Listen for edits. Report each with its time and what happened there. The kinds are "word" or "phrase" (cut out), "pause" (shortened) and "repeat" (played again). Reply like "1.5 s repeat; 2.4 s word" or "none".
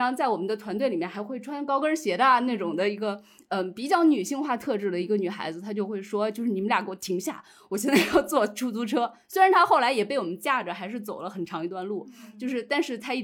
none